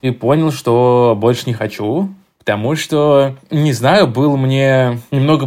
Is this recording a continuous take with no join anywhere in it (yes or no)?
yes